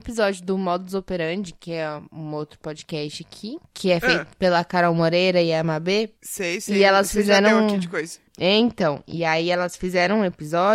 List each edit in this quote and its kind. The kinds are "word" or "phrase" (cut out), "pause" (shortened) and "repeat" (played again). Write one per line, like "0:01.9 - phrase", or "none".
0:06.2 - pause
0:08.3 - pause